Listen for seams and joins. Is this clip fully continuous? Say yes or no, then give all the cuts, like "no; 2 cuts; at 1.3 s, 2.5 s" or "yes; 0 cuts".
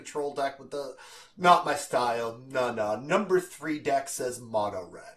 yes; 0 cuts